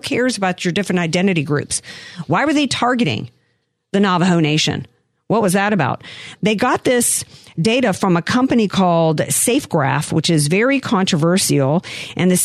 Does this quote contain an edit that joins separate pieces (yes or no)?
no